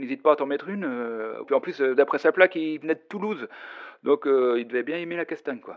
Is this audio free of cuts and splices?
no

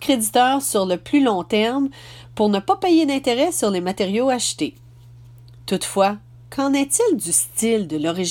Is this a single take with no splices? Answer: yes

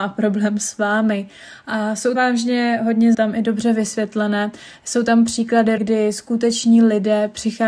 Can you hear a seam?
yes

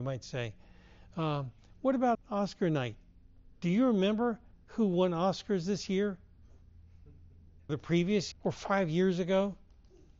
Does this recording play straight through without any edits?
no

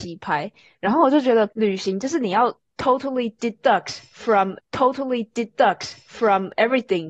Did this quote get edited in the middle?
yes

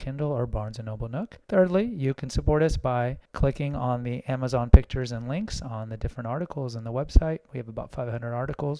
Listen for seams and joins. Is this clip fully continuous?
no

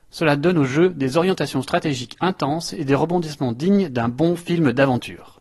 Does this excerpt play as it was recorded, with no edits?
yes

